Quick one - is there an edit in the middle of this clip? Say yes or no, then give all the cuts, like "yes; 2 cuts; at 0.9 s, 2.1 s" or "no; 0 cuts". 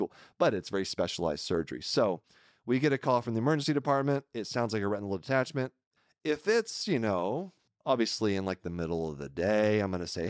no; 0 cuts